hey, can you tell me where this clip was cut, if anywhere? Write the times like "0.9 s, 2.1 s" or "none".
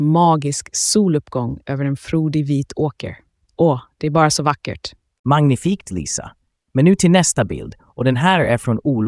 none